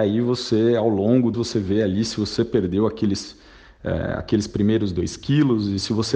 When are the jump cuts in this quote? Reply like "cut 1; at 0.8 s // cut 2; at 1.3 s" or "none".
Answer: cut 1; at 1.3 s